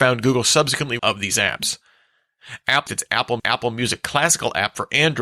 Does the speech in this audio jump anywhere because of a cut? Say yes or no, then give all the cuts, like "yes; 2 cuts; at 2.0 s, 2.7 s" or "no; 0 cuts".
yes; 3 cuts; at 1.0 s, 2.9 s, 3.4 s